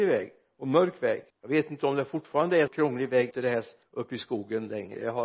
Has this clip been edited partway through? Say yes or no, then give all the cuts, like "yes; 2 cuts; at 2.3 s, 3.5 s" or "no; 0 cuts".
yes; 4 cuts; at 1.3 s, 2.7 s, 3.3 s, 3.8 s